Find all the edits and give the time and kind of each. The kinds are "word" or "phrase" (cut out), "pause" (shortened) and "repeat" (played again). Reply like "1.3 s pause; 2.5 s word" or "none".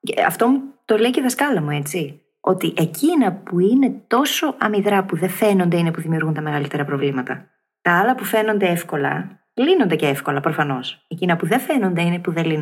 none